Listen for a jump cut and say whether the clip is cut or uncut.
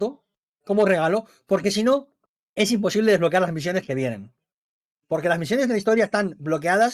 uncut